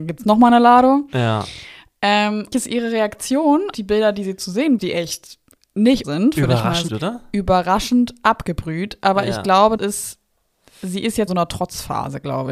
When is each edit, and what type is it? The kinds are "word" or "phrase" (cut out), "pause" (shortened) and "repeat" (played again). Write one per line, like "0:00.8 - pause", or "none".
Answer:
0:02.5 - word
0:03.7 - word
0:04.8 - word
0:06.0 - word
0:06.9 - word
0:09.8 - word
0:11.3 - word

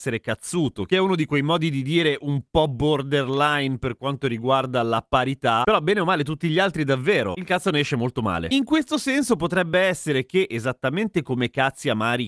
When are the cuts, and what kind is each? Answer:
none

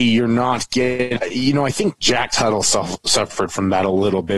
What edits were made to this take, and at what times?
none

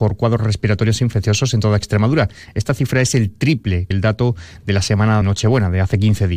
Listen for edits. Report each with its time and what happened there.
0:03.9 - word
0:05.2 - word

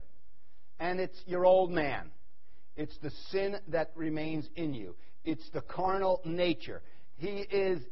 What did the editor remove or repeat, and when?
none

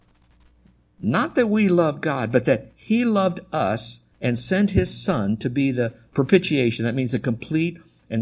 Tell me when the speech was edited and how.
0:04.1 - pause

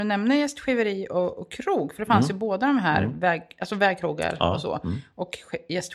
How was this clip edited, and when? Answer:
none

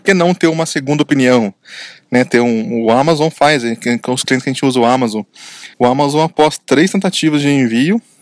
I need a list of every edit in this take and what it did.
0:05.7 - pause

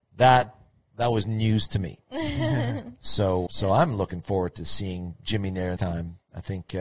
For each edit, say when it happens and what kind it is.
0:03.5 - word
0:05.8 - word

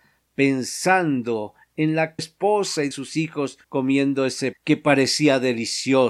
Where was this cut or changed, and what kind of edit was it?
0:02.2 - phrase
0:02.9 - word
0:03.6 - pause
0:04.5 - word

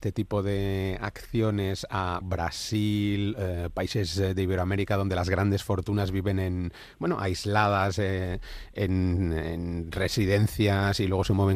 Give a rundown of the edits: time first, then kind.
0:02.2 - word

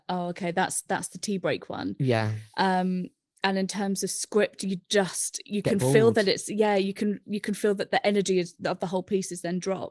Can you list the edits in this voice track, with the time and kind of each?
none

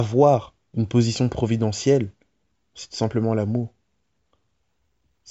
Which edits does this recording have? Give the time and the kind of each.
none

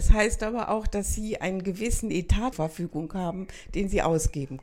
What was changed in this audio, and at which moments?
0:02.5 - word

